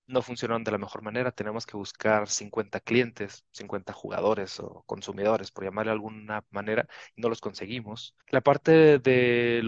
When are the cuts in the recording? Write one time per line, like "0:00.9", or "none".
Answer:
0:08.2